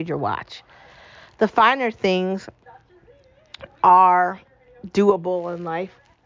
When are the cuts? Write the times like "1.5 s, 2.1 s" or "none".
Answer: none